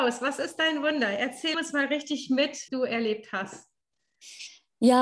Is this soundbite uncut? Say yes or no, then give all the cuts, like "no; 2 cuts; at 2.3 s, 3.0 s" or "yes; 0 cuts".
no; 2 cuts; at 1.5 s, 2.7 s